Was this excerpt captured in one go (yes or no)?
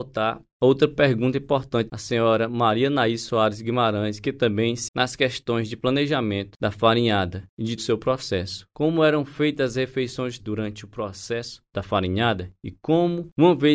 no